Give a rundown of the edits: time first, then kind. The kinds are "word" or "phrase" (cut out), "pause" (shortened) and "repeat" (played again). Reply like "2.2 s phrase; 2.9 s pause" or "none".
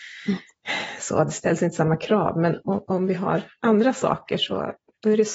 none